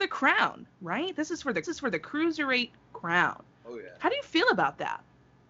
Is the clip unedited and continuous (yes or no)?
no